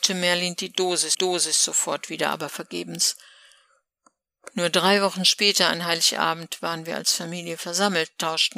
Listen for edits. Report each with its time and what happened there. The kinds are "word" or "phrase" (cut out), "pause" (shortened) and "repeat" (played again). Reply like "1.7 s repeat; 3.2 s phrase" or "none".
1.1 s repeat